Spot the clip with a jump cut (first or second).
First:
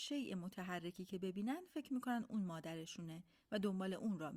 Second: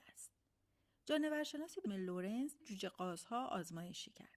second